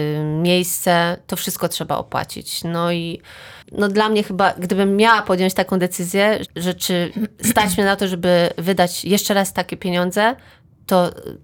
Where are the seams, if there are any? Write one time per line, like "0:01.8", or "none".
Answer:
0:03.6
0:06.5